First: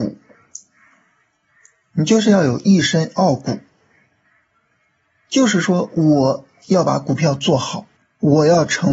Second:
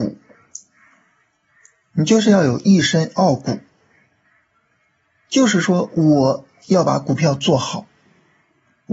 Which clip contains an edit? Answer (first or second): first